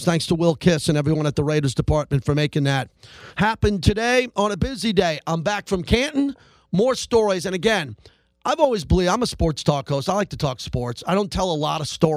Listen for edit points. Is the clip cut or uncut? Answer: uncut